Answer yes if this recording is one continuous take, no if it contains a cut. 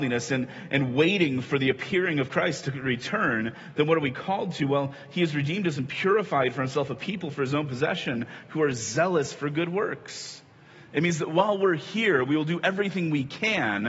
yes